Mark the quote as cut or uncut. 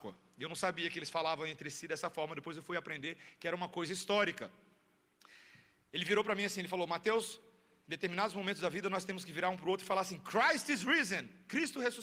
uncut